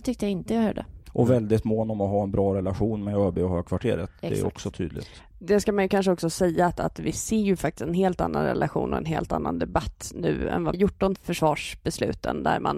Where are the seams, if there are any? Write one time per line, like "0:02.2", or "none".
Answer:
0:01.0
0:10.7
0:11.2